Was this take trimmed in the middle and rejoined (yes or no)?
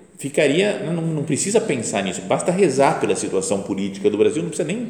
no